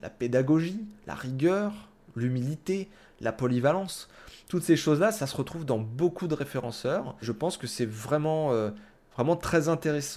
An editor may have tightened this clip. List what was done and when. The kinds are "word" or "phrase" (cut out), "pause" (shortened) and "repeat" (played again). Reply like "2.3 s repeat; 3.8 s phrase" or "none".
5.2 s phrase; 7.2 s word